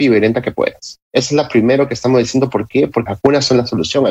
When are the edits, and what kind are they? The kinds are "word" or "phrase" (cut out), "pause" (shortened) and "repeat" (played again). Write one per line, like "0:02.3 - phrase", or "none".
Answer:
0:01.0 - pause
0:03.1 - word